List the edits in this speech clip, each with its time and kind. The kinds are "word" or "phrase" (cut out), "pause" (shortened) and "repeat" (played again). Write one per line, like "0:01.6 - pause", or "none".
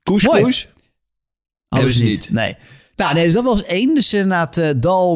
none